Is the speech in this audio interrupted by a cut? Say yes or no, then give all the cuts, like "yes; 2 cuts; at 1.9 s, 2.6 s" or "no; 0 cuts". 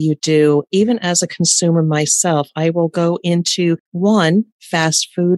yes; 1 cut; at 3.8 s